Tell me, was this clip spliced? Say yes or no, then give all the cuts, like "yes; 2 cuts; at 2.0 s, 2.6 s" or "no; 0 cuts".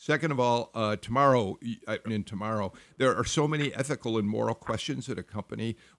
yes; 1 cut; at 2.1 s